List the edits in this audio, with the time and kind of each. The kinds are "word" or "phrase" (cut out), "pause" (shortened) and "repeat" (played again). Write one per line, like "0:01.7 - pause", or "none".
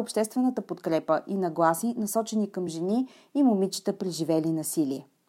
none